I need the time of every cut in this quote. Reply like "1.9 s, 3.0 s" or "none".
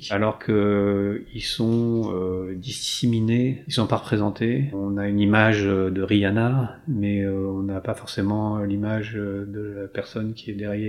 none